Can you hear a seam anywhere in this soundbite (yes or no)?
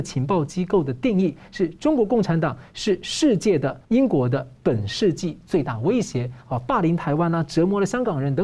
yes